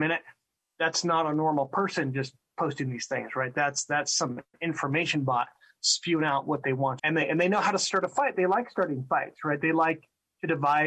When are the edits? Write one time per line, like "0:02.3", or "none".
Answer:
0:07.0